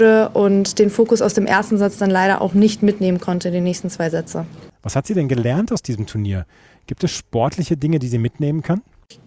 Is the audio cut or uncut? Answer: uncut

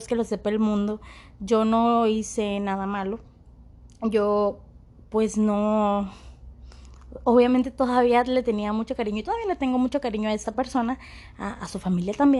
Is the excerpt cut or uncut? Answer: uncut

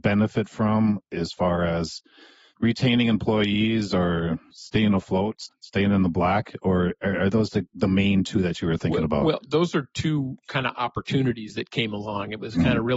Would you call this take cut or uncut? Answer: uncut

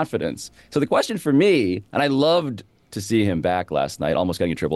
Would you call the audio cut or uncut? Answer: uncut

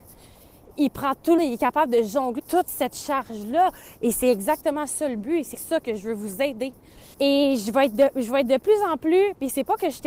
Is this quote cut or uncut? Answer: cut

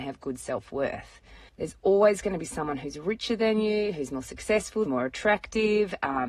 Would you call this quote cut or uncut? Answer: cut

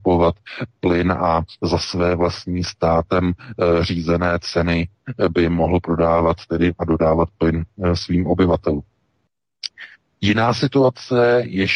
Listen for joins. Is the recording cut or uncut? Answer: uncut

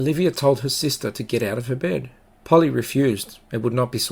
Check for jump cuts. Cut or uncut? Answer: cut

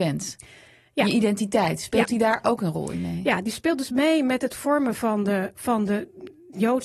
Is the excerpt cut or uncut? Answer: uncut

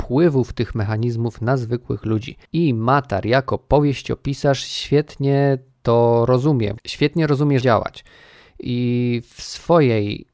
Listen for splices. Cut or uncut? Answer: cut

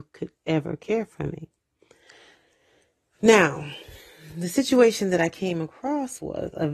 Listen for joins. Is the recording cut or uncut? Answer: uncut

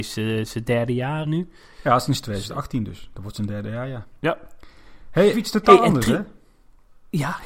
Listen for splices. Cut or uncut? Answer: cut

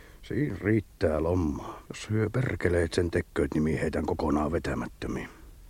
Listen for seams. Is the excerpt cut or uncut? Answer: cut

